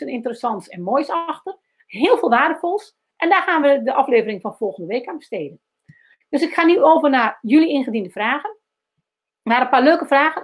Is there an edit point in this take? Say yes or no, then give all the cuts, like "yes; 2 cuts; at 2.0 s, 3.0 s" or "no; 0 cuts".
no; 0 cuts